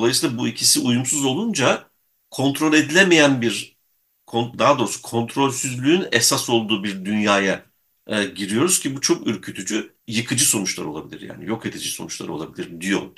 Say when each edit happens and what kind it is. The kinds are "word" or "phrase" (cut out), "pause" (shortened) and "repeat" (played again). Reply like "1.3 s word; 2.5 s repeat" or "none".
10.0 s pause